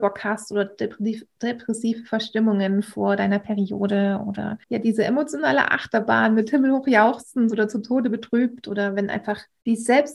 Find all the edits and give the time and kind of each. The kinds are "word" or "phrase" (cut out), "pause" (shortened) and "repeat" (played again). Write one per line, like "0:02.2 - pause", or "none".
0:04.6 - pause